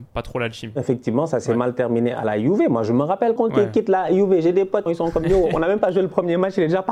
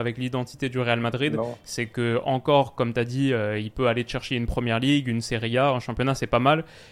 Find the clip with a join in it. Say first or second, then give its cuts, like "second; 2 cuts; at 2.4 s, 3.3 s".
first; 2 cuts; at 3.4 s, 4.9 s